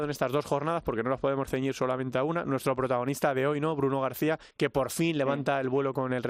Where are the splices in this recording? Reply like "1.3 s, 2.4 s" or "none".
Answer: 4.5 s